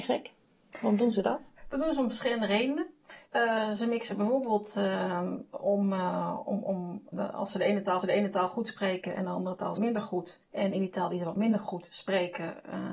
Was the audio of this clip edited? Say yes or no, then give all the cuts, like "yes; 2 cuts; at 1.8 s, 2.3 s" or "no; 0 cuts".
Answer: yes; 6 cuts; at 1.6 s, 3.3 s, 7.1 s, 8.0 s, 9.8 s, 10.4 s